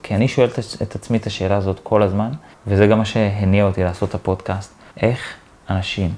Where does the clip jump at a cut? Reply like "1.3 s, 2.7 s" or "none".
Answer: 2.5 s, 4.9 s